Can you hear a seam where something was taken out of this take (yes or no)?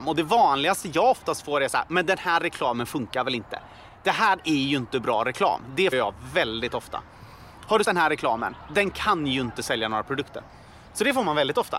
yes